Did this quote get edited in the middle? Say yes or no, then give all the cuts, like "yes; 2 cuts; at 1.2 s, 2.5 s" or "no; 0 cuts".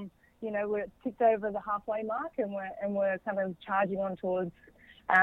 no; 0 cuts